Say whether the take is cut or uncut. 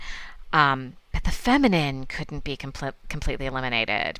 uncut